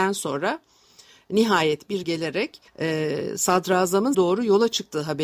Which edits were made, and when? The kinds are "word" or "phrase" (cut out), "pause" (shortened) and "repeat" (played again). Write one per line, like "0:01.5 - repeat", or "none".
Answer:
0:02.0 - word
0:02.7 - pause
0:04.1 - word